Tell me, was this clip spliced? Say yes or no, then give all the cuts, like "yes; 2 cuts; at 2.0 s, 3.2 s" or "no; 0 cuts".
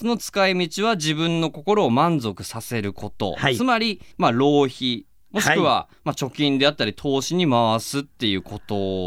yes; 2 cuts; at 4.1 s, 5.9 s